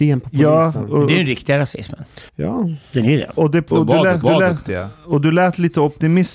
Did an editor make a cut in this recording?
yes; 4 cuts; at 2.3 s, 3.4 s, 3.7 s, 4.2 s

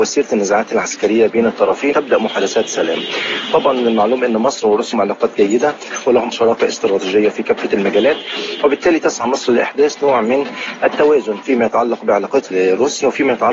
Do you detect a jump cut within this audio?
yes; 4 cuts; at 1.9 s, 4.9 s, 6.3 s, 12.5 s

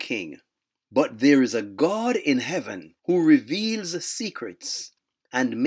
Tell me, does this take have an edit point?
yes; 1 cut; at 3.0 s

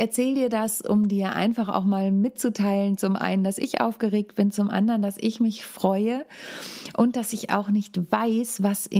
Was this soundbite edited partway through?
no; 0 cuts

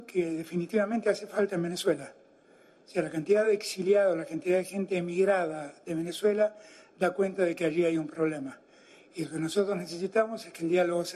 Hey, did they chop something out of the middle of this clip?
no; 0 cuts

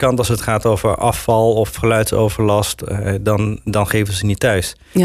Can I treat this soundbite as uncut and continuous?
yes; 0 cuts

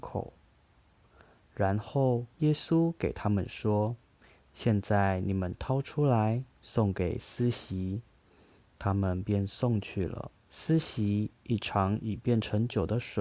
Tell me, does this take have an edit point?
yes; 5 cuts; at 2.3 s, 4.0 s, 6.5 s, 8.1 s, 10.4 s

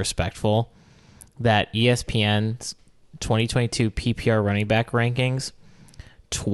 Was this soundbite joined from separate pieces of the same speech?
no; 0 cuts

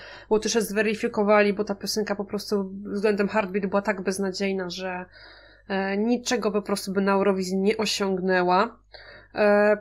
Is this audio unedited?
yes; 0 cuts

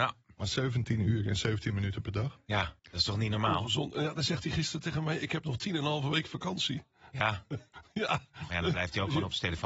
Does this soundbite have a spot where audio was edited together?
yes; 1 cut; at 2.8 s

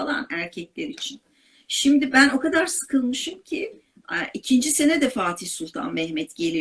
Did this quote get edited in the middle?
no; 0 cuts

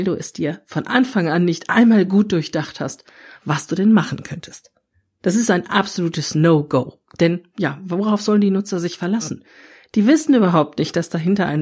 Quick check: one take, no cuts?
yes; 0 cuts

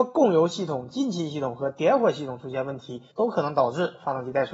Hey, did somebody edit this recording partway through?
yes; 1 cut; at 3.1 s

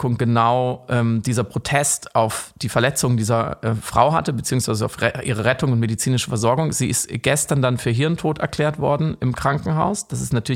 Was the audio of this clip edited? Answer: no; 0 cuts

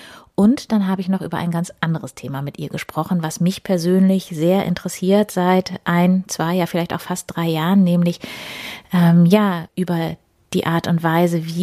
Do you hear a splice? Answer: no; 0 cuts

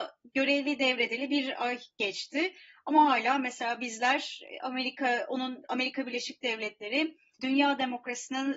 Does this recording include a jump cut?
yes; 1 cut; at 7.4 s

